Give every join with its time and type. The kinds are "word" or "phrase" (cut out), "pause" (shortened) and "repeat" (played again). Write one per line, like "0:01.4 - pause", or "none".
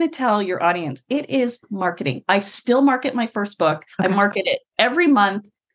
0:03.9 - pause